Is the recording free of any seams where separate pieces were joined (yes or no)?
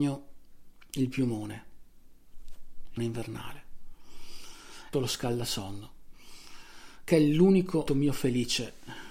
no